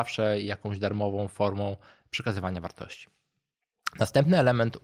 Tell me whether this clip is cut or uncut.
uncut